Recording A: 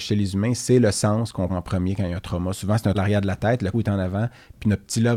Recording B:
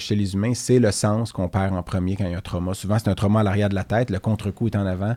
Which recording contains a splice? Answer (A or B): A